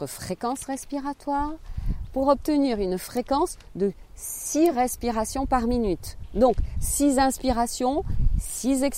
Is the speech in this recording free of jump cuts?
yes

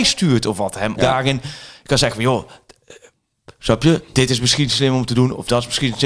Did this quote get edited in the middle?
yes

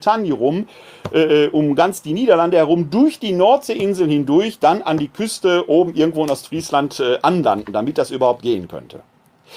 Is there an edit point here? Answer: no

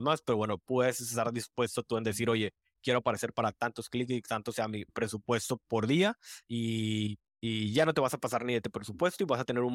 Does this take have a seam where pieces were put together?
no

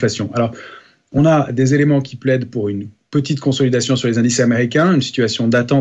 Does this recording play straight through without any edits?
yes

